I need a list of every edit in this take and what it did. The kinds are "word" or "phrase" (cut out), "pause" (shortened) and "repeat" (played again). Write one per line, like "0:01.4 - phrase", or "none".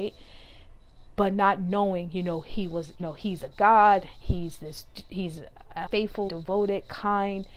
0:03.0 - word
0:04.2 - word
0:05.9 - word
0:06.3 - word

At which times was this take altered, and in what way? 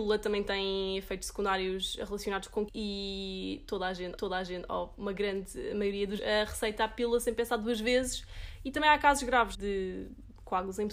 0:02.7 - word
0:04.2 - repeat
0:06.2 - word
0:09.5 - word

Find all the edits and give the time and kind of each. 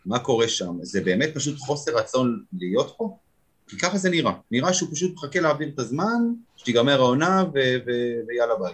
0:04.4 - pause
0:06.5 - pause

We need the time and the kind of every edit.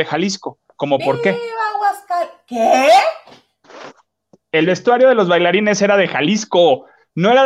none

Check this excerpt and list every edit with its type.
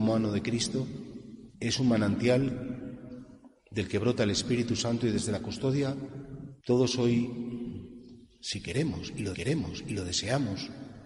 0:01.5 - pause
0:06.6 - pause
0:09.3 - repeat

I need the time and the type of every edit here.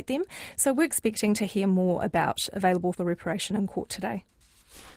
0:02.9 - word

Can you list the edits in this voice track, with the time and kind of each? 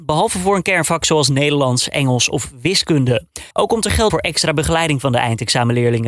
0:03.5 - pause
0:04.1 - word

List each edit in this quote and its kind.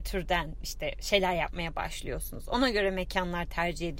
none

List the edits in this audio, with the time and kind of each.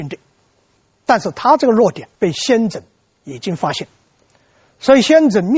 0:02.1 - pause

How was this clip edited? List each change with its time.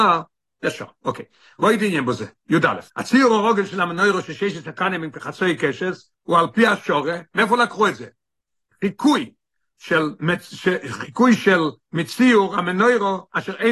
0:02.9 - pause
0:06.1 - pause

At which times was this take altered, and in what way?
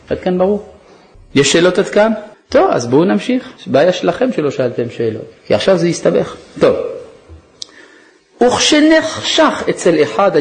0:02.3 - pause
0:03.6 - pause
0:05.4 - pause

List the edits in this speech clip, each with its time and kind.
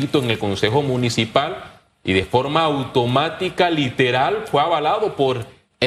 none

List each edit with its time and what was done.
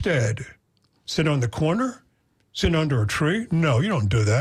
none

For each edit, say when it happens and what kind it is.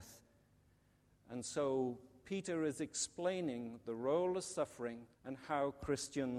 0:05.1 - pause

